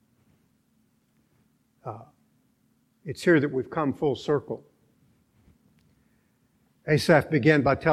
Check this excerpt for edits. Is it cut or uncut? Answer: uncut